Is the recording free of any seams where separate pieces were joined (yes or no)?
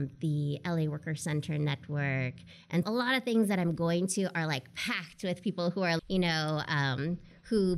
no